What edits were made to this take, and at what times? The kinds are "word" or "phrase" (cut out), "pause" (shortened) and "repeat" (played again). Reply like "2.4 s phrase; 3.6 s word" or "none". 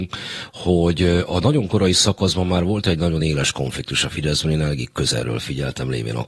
none